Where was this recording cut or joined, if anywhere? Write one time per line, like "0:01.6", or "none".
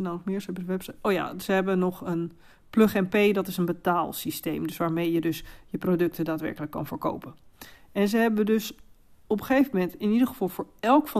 none

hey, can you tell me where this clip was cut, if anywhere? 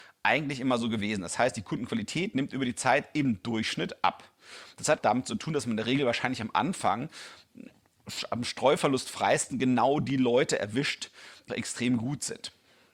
0:05.0
0:11.5

